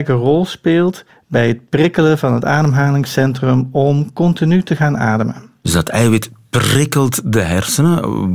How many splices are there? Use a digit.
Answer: 1